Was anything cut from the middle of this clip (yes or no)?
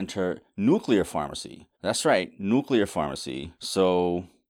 yes